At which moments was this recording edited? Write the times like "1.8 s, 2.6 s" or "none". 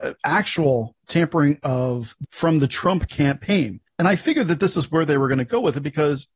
2.2 s, 3.9 s